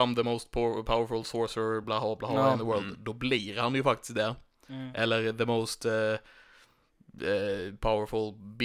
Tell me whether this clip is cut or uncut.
uncut